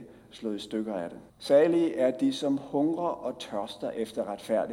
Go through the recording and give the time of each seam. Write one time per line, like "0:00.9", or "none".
0:01.3